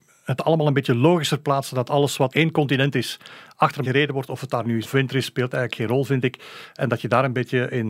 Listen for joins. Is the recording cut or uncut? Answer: cut